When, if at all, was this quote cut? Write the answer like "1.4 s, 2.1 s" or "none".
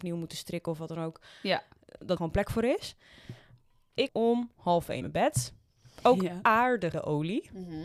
2.2 s, 4.1 s, 5.0 s, 6.9 s